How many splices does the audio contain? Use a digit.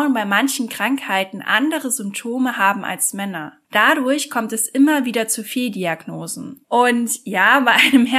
2